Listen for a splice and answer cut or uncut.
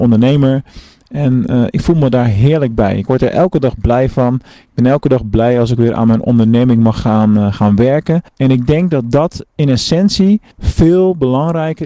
cut